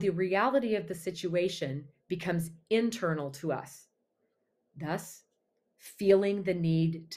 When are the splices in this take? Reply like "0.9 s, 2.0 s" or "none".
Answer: none